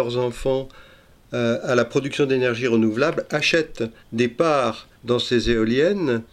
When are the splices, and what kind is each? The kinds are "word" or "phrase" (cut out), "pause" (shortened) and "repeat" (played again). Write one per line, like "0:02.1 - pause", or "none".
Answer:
0:04.0 - pause
0:04.9 - pause